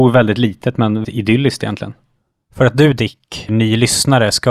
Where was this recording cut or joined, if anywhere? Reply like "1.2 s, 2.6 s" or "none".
1.0 s, 3.5 s